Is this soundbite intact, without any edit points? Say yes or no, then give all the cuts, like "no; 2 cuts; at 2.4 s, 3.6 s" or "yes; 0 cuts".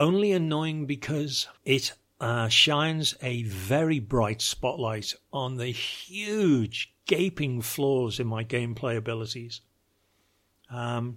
no; 1 cut; at 1.6 s